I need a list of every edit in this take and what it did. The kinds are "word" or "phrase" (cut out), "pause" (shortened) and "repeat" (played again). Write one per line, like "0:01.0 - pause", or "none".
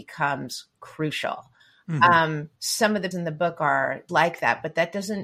0:01.6 - pause
0:02.6 - pause
0:03.1 - word
0:04.1 - phrase